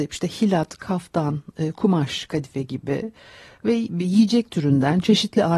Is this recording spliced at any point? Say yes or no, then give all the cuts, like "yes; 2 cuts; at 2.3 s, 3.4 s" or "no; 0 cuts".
no; 0 cuts